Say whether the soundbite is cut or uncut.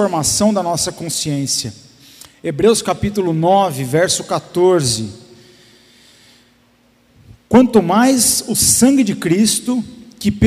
uncut